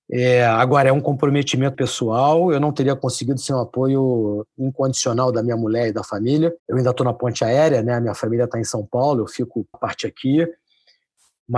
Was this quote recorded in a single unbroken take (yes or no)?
no